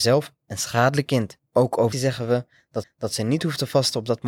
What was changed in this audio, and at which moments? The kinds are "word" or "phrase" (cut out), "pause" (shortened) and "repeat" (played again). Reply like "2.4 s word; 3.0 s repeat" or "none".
1.1 s phrase; 1.5 s pause; 1.9 s phrase; 2.8 s repeat